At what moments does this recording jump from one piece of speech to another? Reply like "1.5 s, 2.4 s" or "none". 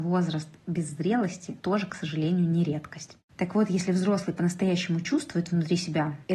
1.6 s